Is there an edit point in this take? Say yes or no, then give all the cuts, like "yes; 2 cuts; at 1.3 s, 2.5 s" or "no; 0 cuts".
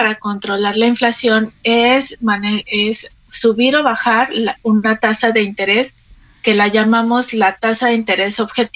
no; 0 cuts